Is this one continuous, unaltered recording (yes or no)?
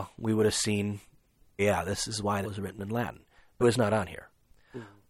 no